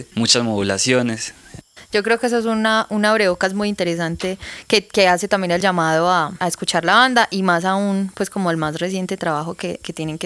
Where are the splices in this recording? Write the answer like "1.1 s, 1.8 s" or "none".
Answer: none